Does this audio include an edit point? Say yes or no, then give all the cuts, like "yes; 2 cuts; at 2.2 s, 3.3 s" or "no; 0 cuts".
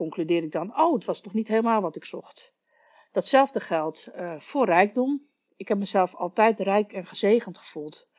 no; 0 cuts